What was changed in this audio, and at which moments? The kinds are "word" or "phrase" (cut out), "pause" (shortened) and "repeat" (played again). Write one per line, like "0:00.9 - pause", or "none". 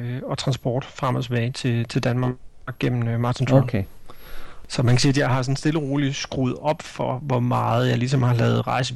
none

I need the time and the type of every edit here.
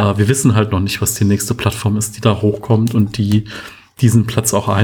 none

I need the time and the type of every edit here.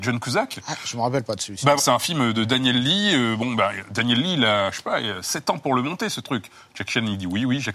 0:01.8 - word

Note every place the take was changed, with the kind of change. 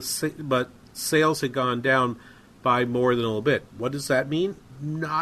none

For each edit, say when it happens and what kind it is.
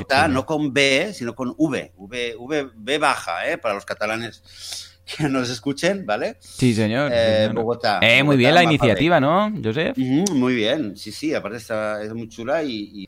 none

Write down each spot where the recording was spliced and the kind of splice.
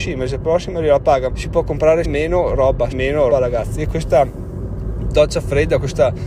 0:01.3 - word
0:02.0 - word
0:02.9 - word
0:03.3 - word

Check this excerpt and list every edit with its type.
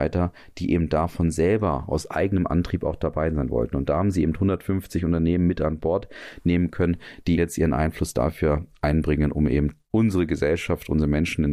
0:07.4 - word

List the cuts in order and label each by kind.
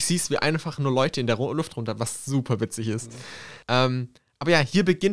0:03.6 - pause

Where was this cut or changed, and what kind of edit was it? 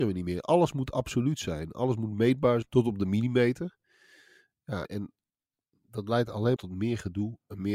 0:02.6 - word
0:04.8 - word
0:06.6 - word

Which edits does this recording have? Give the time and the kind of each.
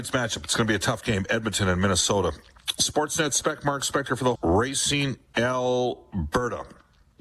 0:04.3 - phrase

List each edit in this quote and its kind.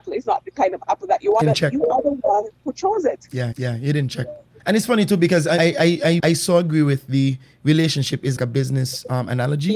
0:01.4 - phrase
0:03.5 - repeat
0:04.6 - pause
0:05.6 - word
0:06.2 - phrase
0:08.4 - word

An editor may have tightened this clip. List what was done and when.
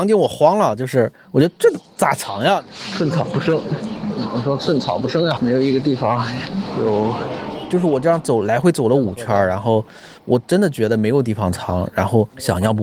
0:05.4 - word

